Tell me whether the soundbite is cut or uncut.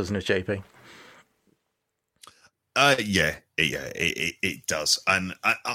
uncut